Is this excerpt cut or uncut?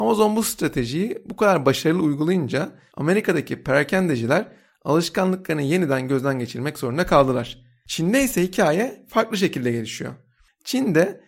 uncut